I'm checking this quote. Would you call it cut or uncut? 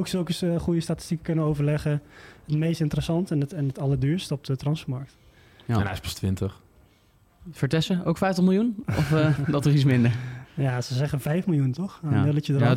uncut